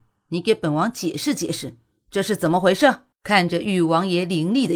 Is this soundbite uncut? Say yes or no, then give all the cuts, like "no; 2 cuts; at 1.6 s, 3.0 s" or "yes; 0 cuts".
no; 1 cut; at 3.1 s